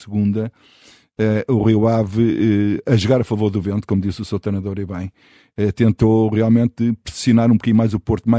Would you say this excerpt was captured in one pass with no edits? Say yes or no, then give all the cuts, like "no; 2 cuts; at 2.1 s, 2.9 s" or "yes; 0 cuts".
yes; 0 cuts